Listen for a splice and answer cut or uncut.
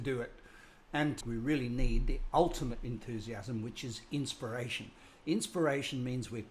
cut